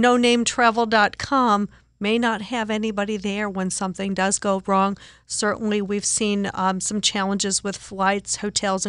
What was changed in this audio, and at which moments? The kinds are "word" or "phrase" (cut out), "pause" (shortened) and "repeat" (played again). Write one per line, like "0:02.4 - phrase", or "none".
none